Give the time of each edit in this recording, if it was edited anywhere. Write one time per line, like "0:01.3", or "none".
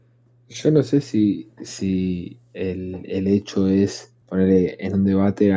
0:04.2